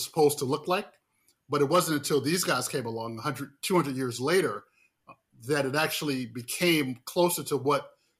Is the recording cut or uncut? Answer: uncut